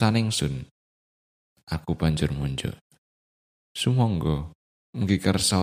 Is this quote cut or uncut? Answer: uncut